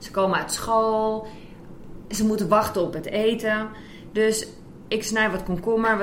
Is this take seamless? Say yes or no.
yes